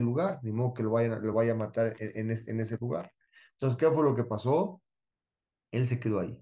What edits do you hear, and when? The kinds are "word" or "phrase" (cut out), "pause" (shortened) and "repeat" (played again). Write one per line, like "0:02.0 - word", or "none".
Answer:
none